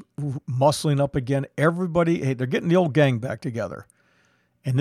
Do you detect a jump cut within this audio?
no; 0 cuts

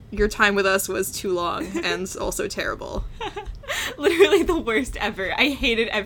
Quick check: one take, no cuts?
yes; 0 cuts

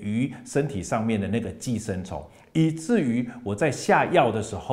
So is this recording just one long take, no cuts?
yes; 0 cuts

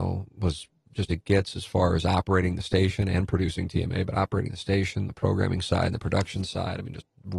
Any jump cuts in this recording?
yes; 1 cut; at 1.1 s

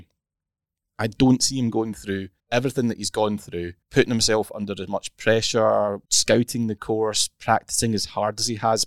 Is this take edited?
yes; 3 cuts; at 2.4 s, 3.8 s, 6.1 s

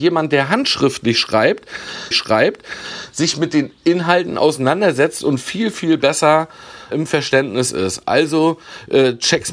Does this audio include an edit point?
yes; 2 cuts; at 2.1 s, 6.9 s

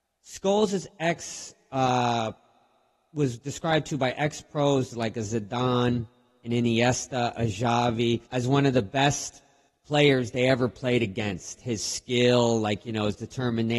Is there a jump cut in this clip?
yes; 2 cuts; at 8.3 s, 9.7 s

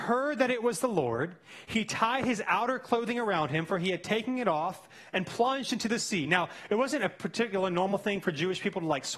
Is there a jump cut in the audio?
no; 0 cuts

